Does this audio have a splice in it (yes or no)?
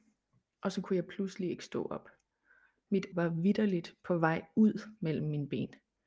yes